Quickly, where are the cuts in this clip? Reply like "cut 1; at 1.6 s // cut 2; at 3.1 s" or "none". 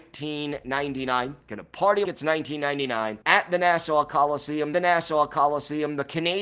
cut 1; at 2.0 s // cut 2; at 3.2 s // cut 3; at 4.7 s